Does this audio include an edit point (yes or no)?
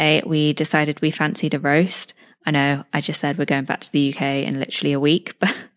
no